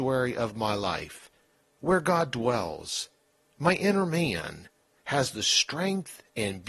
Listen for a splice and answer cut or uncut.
uncut